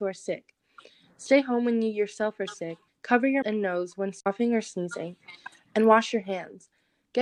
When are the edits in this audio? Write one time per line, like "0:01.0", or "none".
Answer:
0:02.9
0:03.4